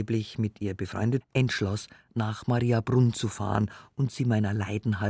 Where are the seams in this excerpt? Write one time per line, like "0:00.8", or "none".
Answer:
0:01.2